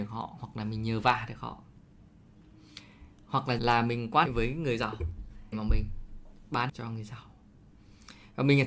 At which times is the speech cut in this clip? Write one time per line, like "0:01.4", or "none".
0:03.6
0:04.3
0:05.5
0:06.7